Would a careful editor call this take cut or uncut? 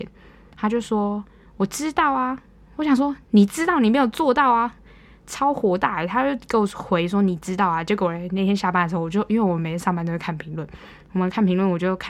uncut